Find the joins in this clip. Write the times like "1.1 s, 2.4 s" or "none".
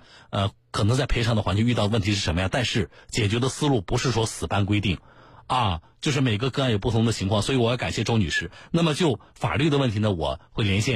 none